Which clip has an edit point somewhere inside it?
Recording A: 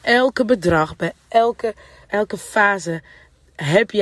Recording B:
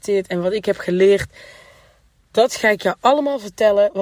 A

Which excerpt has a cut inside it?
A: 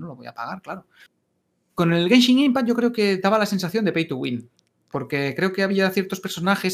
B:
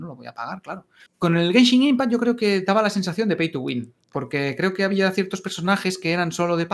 B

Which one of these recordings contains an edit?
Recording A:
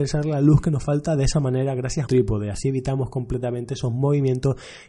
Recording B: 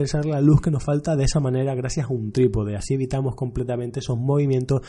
A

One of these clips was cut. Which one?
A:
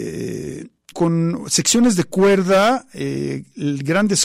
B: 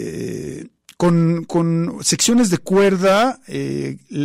A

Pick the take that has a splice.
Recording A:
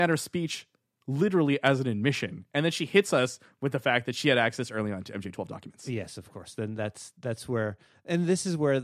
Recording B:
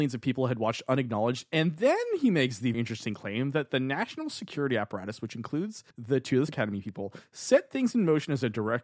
B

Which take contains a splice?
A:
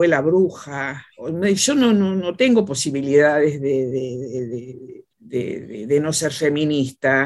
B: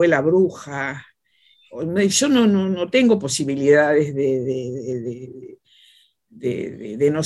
A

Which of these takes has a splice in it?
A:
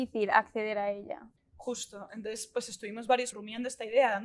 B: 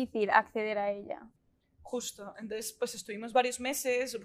A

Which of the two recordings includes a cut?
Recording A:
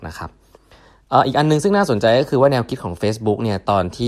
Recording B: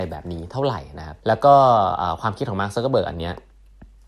B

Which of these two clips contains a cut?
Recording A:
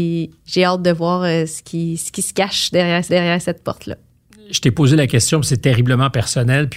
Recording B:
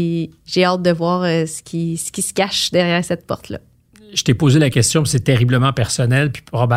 A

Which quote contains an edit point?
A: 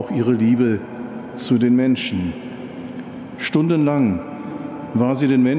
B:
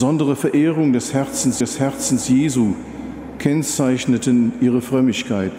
B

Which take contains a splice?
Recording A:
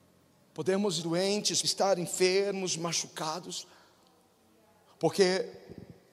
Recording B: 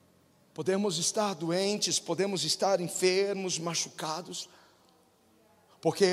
A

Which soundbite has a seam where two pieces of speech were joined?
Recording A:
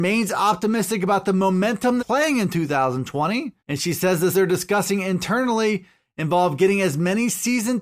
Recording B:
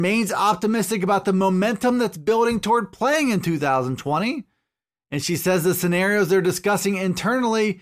A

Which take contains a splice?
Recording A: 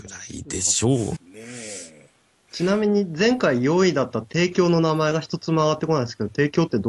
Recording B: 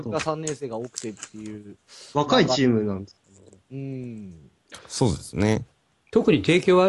A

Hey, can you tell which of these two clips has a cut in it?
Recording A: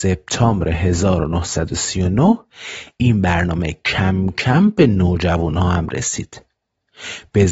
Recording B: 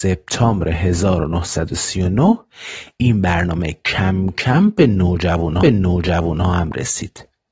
B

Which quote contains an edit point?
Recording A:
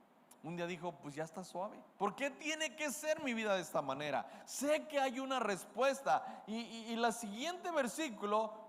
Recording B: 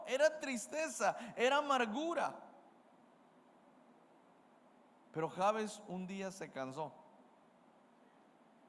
A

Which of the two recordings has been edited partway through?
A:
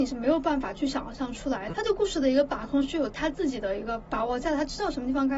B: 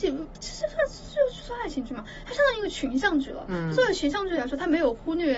A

